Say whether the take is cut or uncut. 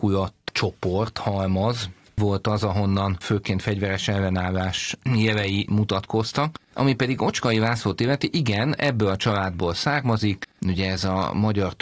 uncut